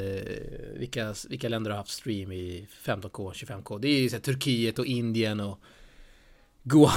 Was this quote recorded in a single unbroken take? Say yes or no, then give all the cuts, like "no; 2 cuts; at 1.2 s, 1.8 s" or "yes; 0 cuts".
yes; 0 cuts